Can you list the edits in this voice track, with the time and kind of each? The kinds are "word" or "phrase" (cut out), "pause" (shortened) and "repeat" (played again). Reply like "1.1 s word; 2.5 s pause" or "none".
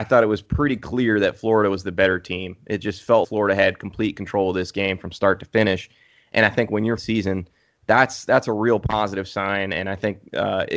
3.2 s word; 7.0 s phrase